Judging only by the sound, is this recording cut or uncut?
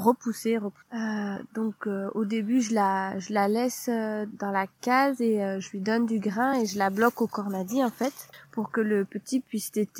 uncut